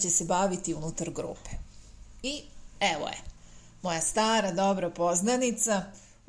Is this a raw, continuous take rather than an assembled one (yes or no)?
yes